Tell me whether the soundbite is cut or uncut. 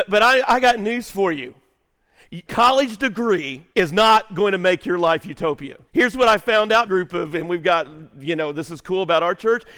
cut